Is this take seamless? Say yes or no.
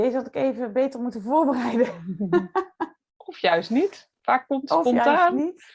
yes